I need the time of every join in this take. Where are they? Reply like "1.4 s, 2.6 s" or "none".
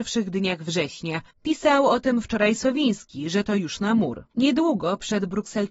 1.3 s, 4.3 s